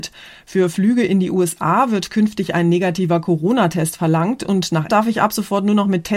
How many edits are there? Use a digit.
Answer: 1